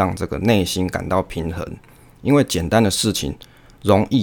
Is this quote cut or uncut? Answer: uncut